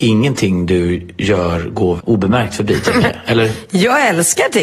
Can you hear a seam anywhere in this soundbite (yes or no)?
yes